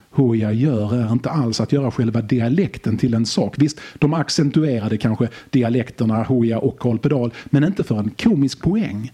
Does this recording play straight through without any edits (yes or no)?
yes